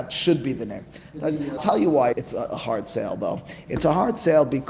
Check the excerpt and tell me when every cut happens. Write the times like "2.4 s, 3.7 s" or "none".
1.6 s, 2.1 s